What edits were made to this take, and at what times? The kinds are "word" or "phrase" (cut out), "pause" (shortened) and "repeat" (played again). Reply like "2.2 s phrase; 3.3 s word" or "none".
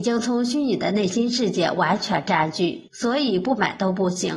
2.9 s pause